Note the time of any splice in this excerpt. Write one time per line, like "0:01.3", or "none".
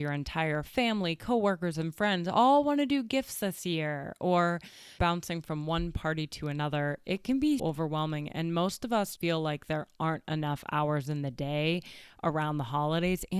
0:05.0
0:07.6
0:09.2